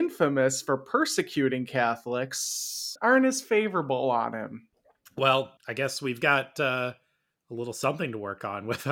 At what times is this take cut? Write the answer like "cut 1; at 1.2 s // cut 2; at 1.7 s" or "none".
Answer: cut 1; at 3.0 s // cut 2; at 5.6 s